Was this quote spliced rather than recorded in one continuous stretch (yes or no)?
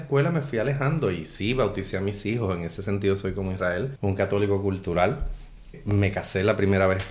no